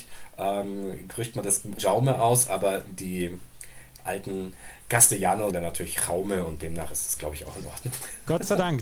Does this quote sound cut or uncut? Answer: cut